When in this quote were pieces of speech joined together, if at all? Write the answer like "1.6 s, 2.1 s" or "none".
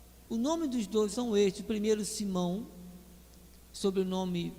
1.1 s